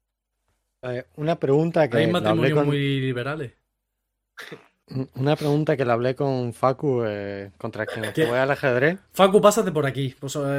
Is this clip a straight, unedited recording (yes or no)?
yes